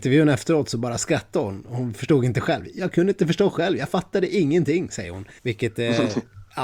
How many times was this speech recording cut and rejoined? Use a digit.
1